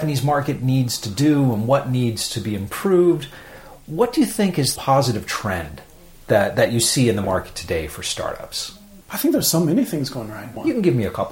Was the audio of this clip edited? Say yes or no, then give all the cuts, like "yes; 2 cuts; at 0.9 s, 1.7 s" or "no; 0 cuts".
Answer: yes; 2 cuts; at 4.8 s, 9.0 s